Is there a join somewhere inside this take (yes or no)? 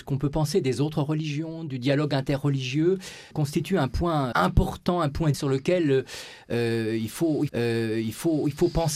yes